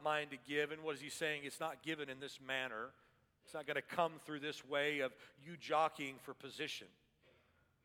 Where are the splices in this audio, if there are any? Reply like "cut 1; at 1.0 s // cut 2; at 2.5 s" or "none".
none